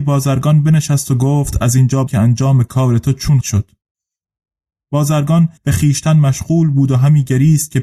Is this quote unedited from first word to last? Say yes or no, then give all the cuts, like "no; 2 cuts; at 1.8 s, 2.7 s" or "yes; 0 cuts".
no; 3 cuts; at 2.1 s, 3.4 s, 5.6 s